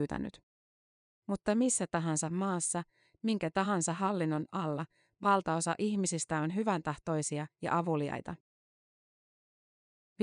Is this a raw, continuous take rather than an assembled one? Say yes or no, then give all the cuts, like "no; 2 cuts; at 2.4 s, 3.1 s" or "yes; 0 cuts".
yes; 0 cuts